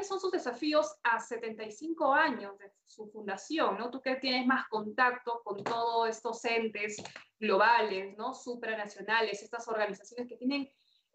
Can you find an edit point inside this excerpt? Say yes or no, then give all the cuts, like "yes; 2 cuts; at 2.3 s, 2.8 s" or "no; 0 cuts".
no; 0 cuts